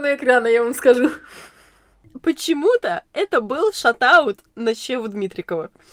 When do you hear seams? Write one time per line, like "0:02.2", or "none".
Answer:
none